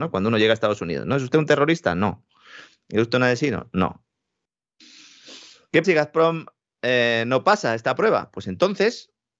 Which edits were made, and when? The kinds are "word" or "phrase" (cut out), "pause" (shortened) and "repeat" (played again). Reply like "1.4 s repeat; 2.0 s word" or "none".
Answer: 5.8 s word